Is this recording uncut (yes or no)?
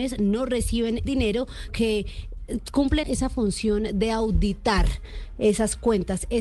no